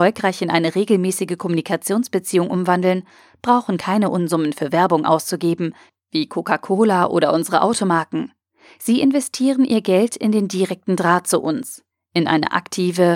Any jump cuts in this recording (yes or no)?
no